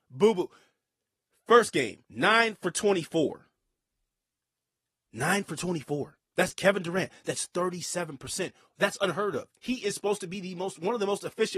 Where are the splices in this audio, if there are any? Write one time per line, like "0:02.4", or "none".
0:02.0